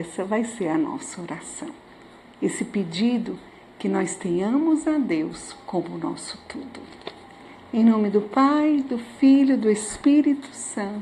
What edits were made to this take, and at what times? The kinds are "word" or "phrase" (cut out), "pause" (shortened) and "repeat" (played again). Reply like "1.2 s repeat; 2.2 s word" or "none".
none